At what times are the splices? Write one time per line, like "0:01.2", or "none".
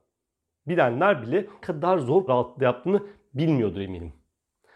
0:01.6
0:02.3